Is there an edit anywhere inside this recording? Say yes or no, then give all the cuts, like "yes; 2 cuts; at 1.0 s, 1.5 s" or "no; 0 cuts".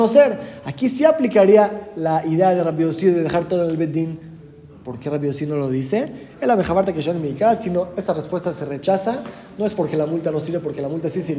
no; 0 cuts